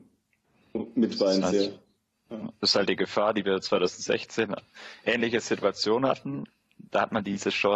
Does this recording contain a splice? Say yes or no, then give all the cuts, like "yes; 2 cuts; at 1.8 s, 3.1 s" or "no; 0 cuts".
no; 0 cuts